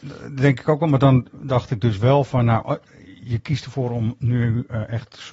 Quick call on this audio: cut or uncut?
uncut